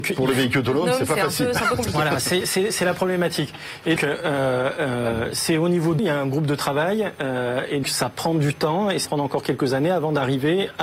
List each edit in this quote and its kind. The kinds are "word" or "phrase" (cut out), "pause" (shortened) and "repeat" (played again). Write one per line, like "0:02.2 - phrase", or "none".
0:04.0 - word
0:06.0 - word
0:07.8 - word
0:09.0 - word

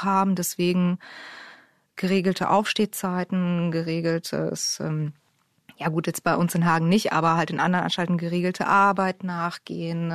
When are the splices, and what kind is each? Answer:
none

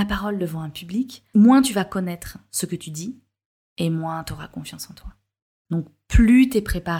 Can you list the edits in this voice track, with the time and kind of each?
none

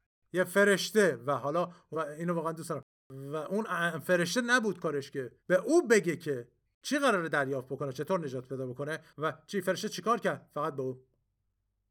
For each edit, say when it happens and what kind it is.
0:01.9 - word
0:05.4 - pause
0:06.7 - pause

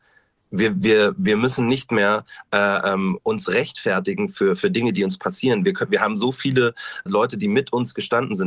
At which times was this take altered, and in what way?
0:07.1 - word

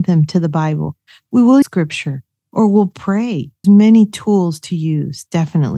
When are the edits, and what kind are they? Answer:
0:01.6 - word
0:03.6 - word

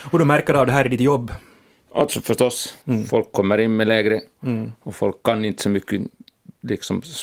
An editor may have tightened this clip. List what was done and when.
0:02.8 - pause
0:04.4 - word

